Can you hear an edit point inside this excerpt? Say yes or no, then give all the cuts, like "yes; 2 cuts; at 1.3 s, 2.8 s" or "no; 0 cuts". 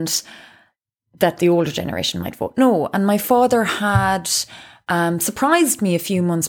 no; 0 cuts